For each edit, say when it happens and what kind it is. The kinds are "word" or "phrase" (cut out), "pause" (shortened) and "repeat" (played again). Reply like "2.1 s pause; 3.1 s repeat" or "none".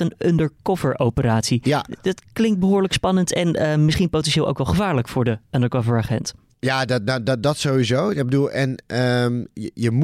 none